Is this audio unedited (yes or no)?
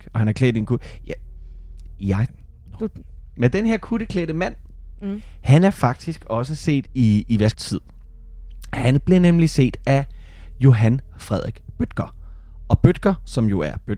no